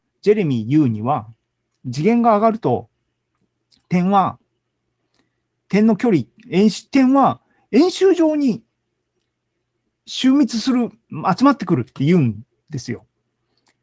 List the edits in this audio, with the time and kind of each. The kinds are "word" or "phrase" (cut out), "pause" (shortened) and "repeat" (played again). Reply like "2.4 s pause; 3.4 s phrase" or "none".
none